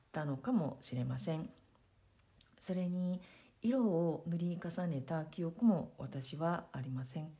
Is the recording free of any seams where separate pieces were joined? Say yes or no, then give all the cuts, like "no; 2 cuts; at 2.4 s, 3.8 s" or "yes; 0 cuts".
yes; 0 cuts